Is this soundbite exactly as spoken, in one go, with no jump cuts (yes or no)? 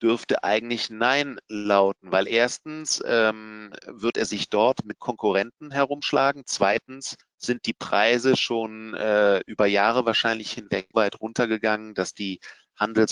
no